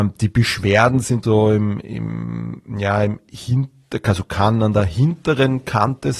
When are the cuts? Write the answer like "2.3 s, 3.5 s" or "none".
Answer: 1.2 s